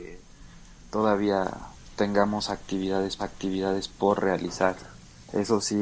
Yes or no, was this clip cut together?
yes